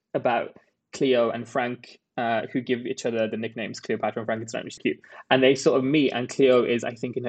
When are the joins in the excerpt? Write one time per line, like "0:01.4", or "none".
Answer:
0:04.8